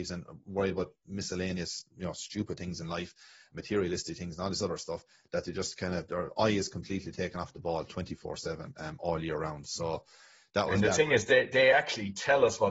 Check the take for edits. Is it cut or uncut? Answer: uncut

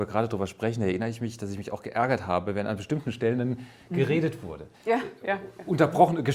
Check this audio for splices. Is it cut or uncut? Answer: cut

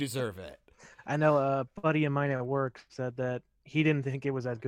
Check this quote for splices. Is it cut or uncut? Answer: uncut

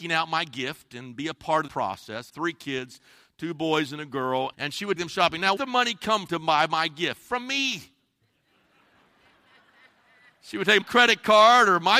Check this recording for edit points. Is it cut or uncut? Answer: cut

